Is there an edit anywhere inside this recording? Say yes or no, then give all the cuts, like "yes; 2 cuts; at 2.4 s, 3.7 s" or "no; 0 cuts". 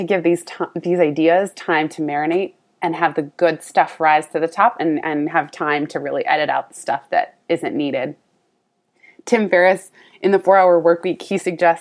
no; 0 cuts